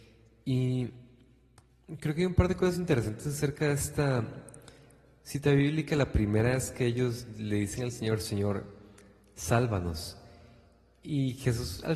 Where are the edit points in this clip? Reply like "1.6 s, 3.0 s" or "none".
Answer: none